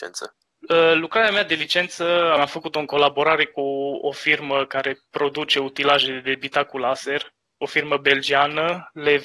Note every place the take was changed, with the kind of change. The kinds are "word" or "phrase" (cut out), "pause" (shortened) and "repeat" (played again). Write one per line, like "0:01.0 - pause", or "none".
0:05.1 - pause

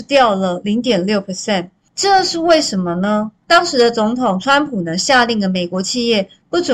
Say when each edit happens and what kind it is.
none

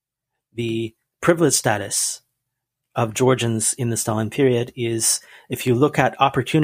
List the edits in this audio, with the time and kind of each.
none

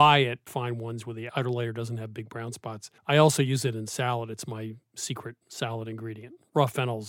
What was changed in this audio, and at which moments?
0:03.0 - pause

